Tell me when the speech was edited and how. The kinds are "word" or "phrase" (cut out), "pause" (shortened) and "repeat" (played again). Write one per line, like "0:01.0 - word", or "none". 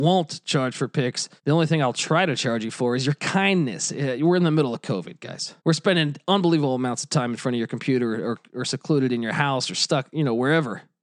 0:01.4 - pause
0:05.6 - pause